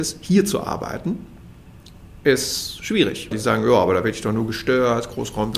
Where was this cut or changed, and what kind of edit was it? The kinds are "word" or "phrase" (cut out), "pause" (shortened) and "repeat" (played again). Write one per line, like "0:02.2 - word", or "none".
0:03.3 - word